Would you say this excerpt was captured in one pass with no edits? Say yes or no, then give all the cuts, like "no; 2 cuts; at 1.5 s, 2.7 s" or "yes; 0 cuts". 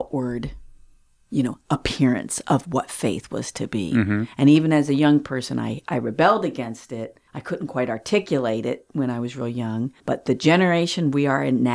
no; 2 cuts; at 7.3 s, 10.0 s